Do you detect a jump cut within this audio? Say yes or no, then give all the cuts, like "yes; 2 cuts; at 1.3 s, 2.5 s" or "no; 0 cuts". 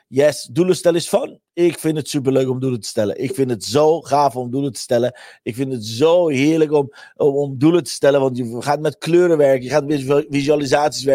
no; 0 cuts